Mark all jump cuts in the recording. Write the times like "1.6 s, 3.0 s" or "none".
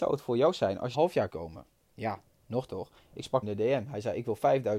0.9 s, 1.3 s, 1.7 s, 2.7 s, 3.4 s